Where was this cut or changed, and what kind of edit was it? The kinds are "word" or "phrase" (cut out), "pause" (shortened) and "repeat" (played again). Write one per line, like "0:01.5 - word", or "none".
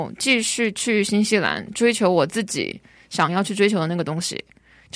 none